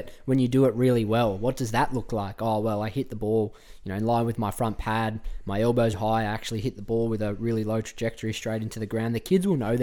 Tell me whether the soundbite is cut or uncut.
cut